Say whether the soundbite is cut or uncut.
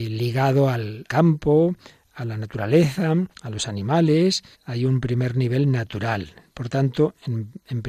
cut